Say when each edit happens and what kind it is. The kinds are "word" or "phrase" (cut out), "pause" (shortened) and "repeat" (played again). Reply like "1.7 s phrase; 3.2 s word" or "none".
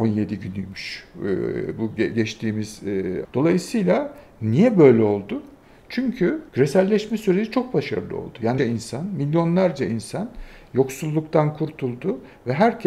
3.2 s word; 6.5 s pause; 8.6 s word